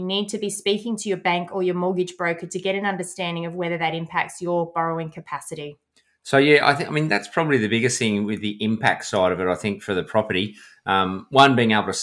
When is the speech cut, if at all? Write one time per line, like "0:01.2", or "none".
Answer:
none